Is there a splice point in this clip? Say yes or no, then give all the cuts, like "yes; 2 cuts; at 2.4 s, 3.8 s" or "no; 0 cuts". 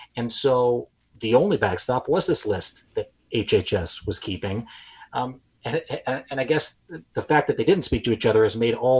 no; 0 cuts